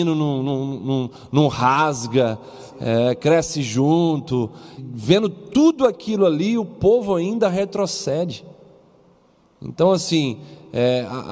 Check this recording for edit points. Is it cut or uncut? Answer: cut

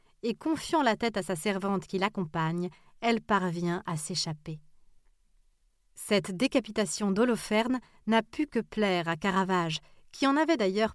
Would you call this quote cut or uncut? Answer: uncut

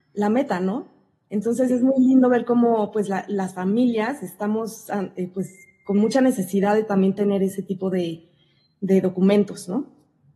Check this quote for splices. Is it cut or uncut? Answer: uncut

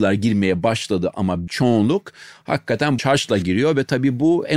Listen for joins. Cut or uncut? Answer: cut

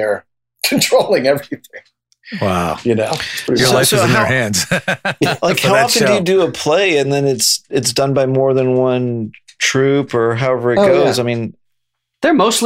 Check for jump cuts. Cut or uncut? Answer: uncut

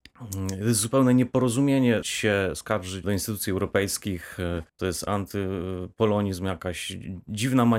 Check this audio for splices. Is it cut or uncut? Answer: cut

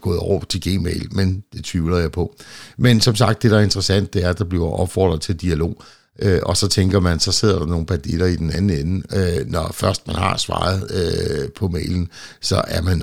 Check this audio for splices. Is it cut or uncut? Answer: uncut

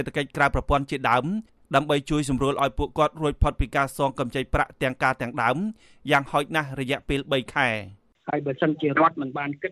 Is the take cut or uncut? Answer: uncut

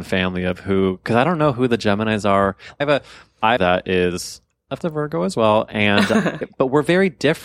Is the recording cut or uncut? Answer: cut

